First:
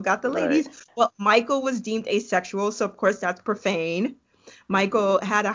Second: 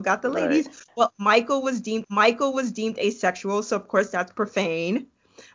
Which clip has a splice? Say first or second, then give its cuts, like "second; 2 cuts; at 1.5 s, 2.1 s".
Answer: second; 1 cut; at 2.0 s